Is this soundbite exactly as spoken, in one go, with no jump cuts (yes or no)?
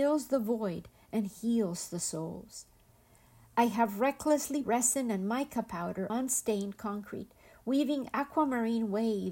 no